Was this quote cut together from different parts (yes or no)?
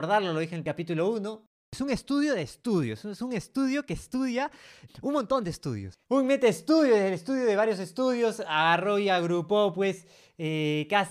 yes